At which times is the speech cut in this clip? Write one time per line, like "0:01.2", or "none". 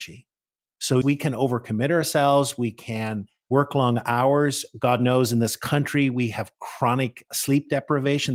0:01.0